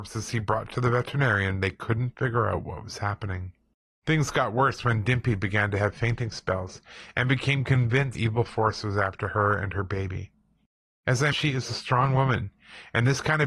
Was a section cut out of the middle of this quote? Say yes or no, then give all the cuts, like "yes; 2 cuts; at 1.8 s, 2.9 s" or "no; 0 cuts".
yes; 3 cuts; at 3.7 s, 8.1 s, 11.3 s